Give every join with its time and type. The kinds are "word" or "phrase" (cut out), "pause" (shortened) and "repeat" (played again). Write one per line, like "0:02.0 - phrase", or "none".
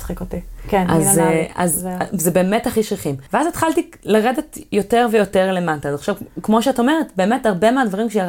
0:03.3 - pause